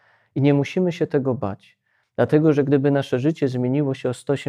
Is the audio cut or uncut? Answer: uncut